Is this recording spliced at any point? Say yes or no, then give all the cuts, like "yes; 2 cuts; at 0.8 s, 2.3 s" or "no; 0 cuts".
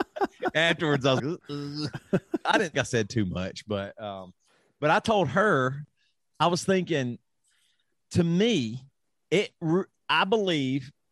yes; 3 cuts; at 1.2 s, 2.7 s, 9.0 s